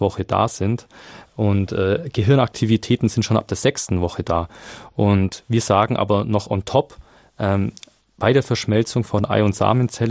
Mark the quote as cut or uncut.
uncut